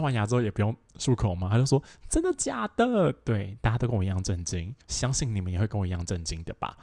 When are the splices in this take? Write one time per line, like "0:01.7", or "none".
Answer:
0:04.8